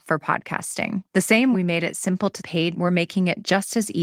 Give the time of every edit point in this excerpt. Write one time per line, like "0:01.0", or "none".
0:01.1
0:01.5
0:02.4
0:02.7